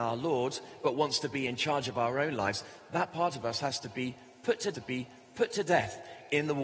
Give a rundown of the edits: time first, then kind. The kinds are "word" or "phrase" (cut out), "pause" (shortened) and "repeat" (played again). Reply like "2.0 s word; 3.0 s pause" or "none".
4.7 s repeat